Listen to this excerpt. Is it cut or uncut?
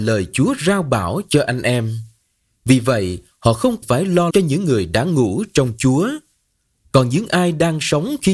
cut